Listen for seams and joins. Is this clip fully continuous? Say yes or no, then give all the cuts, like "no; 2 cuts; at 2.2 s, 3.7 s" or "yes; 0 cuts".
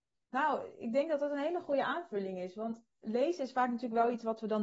no; 1 cut; at 2.9 s